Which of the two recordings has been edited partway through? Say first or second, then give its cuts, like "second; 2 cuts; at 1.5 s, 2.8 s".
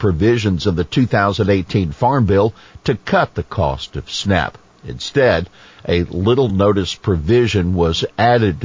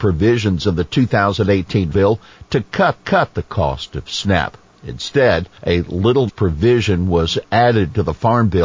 second; 4 cuts; at 1.9 s, 3.0 s, 5.6 s, 6.3 s